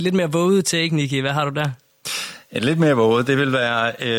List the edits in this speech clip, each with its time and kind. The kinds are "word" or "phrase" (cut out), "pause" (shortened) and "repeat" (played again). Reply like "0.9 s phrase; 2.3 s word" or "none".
none